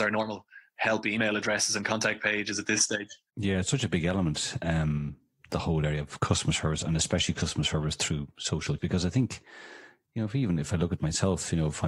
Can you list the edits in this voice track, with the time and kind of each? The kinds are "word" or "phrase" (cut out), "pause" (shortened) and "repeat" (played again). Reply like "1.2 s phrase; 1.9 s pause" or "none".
8.8 s word

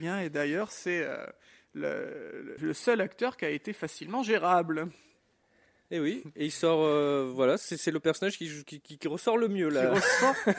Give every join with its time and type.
2.6 s word

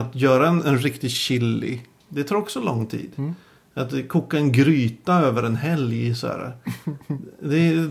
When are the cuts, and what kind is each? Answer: none

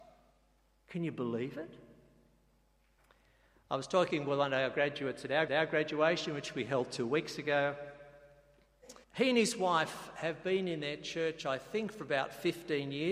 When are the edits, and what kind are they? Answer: 3.0 s pause; 5.5 s repeat; 9.0 s pause

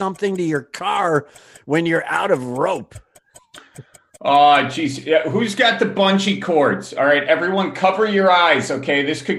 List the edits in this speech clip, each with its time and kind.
none

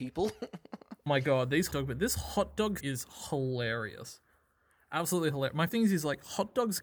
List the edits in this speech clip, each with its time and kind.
1.1 s word; 1.7 s word; 2.8 s word; 5.7 s word

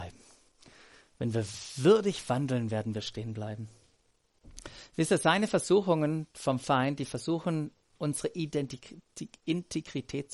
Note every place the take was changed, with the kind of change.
none

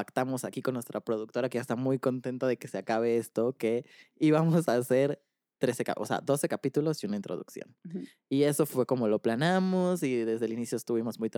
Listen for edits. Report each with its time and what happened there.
none

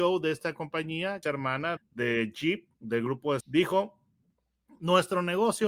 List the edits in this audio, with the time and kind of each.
1.2 s phrase; 1.8 s word; 2.8 s pause; 3.4 s word

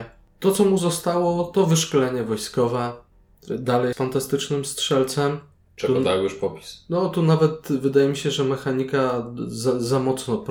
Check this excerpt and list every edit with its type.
3.9 s word

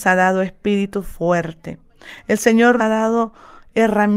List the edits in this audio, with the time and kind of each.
2.8 s word

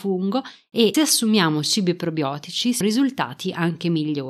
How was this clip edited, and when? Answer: 0.9 s word; 2.8 s word

